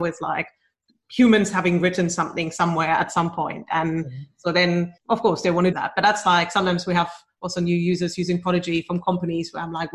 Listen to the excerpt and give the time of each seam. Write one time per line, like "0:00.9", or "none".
0:05.0
0:05.7